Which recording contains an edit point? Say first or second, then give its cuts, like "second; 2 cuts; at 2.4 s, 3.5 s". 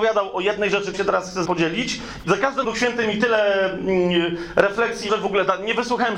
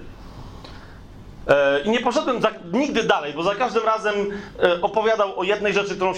first; 5 cuts; at 0.9 s, 1.4 s, 2.2 s, 2.6 s, 5.1 s